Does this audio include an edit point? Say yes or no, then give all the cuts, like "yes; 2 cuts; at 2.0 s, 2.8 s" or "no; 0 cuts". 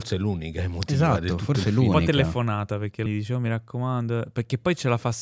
yes; 1 cut; at 3.1 s